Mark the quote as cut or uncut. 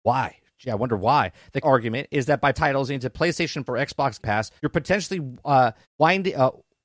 cut